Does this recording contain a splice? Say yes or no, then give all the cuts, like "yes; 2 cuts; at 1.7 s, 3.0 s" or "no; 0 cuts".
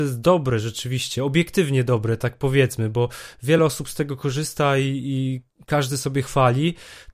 no; 0 cuts